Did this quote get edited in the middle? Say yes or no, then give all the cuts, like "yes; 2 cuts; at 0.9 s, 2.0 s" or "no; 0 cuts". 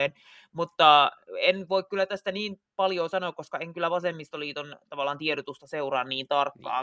no; 0 cuts